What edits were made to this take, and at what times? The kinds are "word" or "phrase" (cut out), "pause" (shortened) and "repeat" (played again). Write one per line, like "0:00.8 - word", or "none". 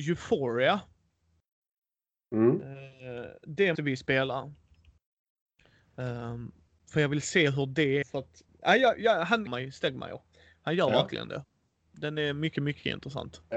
0:03.7 - word
0:08.0 - word
0:08.5 - word
0:09.5 - word